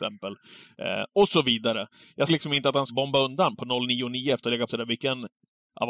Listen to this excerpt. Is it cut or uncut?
cut